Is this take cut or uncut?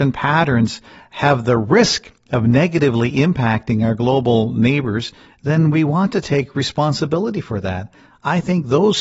uncut